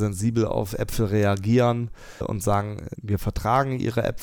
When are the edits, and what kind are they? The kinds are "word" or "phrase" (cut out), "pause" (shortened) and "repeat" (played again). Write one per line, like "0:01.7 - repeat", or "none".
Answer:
0:02.2 - word
0:02.9 - word